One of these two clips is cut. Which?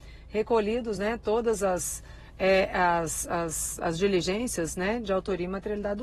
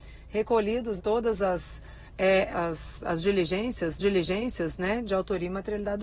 second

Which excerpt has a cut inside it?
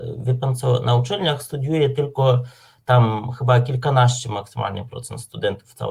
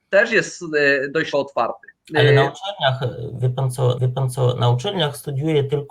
second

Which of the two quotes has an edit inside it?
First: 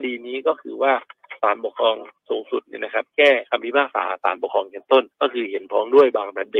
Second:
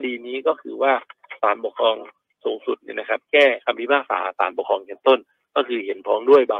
first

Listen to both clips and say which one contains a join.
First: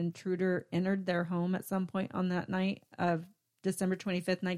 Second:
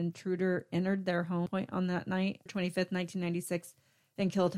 second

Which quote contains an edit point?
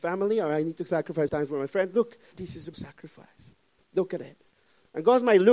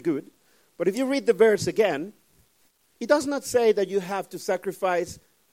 first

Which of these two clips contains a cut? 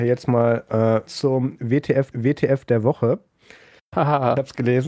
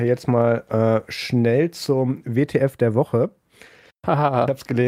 first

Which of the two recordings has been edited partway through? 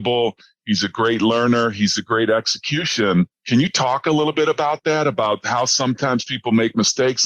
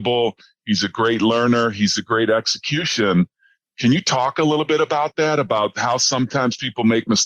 first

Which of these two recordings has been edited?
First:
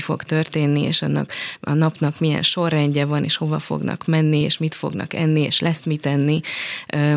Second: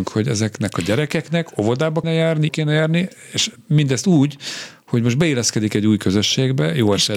second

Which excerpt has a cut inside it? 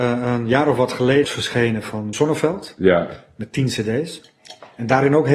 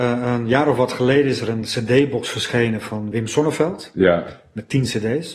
first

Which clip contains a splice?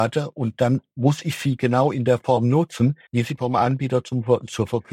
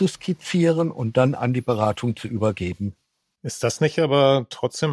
first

